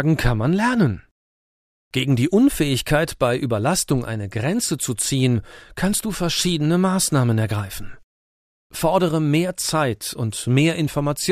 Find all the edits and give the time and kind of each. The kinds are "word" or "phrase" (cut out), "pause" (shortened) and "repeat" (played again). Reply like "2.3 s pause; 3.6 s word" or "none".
none